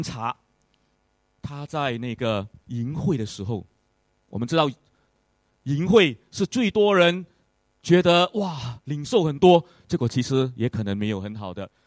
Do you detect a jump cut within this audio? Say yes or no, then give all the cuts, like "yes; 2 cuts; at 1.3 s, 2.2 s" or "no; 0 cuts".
no; 0 cuts